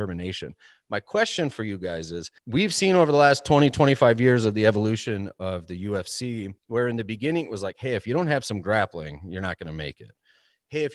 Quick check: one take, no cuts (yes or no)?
no